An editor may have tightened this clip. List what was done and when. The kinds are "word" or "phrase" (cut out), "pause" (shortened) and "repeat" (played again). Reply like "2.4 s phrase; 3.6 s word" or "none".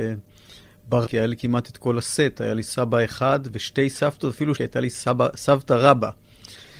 1.1 s word; 4.6 s word